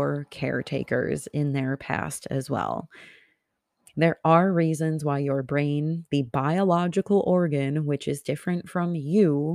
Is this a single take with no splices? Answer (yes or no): yes